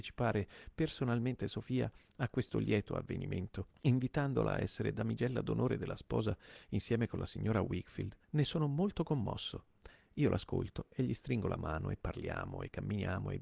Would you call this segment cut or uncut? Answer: cut